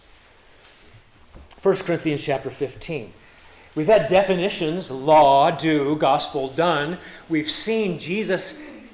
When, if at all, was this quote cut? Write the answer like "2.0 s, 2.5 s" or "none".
none